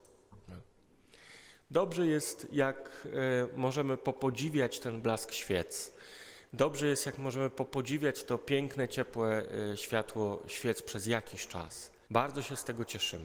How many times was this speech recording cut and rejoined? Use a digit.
1